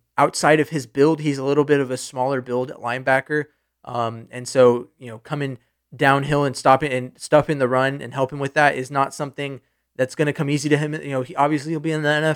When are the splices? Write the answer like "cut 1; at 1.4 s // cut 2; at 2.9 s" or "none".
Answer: none